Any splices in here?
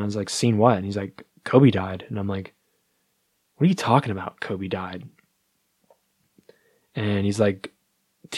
no; 0 cuts

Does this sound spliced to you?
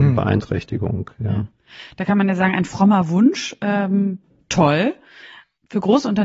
no; 0 cuts

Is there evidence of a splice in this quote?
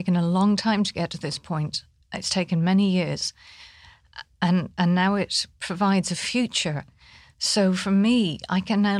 yes; 1 cut; at 2.0 s

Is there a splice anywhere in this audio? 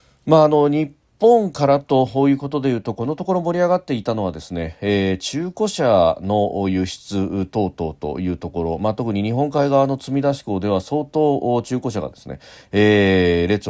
no; 0 cuts

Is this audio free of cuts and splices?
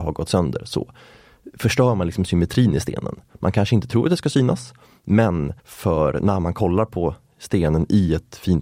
no; 1 cut; at 5.6 s

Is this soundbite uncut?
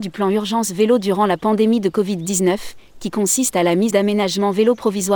no; 1 cut; at 3.9 s

